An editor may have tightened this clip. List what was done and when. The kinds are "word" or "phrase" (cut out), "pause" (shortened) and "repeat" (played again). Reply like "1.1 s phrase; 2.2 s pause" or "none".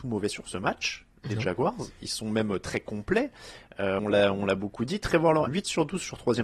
4.0 s word; 5.5 s phrase